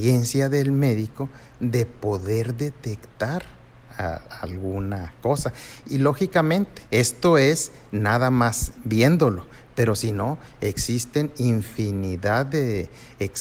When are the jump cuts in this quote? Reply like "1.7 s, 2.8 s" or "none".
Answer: 6.9 s